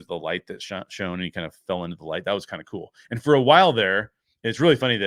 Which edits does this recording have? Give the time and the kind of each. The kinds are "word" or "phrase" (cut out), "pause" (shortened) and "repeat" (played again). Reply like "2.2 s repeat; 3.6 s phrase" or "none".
none